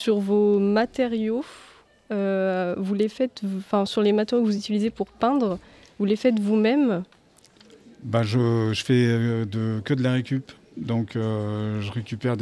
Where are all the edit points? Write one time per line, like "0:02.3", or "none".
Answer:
none